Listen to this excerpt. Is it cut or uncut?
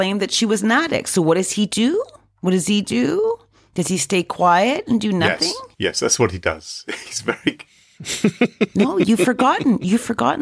uncut